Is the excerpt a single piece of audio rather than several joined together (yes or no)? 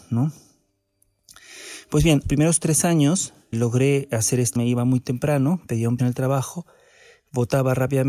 no